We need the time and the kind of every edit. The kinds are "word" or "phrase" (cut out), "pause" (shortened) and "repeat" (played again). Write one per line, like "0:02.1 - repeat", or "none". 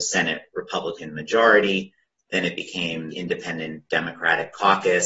0:03.1 - word